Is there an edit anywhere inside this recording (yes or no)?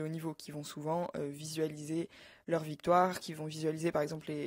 no